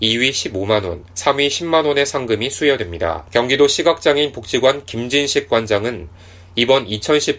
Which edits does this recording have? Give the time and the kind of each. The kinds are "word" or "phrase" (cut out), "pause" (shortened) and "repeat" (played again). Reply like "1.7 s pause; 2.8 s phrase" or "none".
1.1 s pause; 3.3 s pause